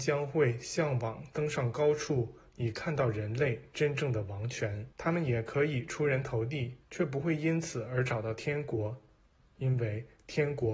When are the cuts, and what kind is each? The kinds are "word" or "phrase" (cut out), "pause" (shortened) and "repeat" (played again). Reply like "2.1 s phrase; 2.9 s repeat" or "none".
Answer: 4.9 s pause; 6.8 s pause

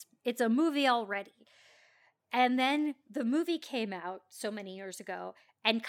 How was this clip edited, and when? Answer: none

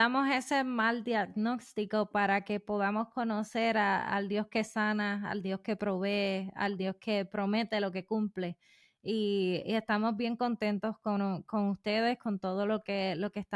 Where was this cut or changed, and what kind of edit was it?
none

